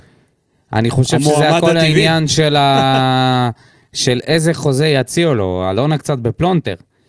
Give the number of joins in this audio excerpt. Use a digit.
0